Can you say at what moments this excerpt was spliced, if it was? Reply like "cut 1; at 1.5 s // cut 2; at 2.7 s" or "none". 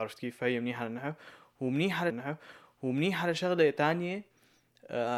cut 1; at 2.1 s